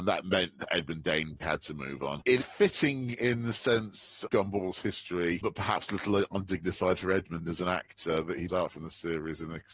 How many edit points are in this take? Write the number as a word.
four